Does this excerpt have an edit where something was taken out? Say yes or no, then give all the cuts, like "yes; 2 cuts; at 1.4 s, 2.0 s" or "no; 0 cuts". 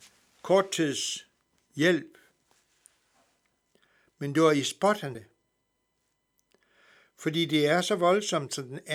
yes; 1 cut; at 5.1 s